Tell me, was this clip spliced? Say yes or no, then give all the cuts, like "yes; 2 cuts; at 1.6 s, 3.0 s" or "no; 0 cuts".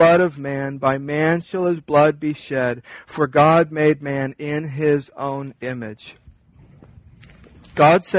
no; 0 cuts